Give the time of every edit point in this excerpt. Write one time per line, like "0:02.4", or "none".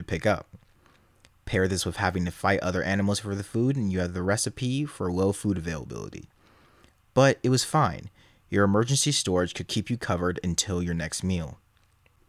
none